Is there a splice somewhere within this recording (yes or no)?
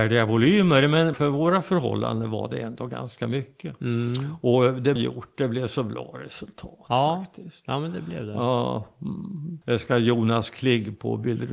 yes